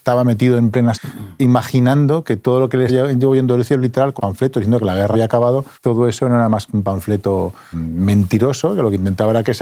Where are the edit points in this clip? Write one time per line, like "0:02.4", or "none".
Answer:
0:00.9
0:02.9
0:04.2
0:05.1
0:05.7
0:07.7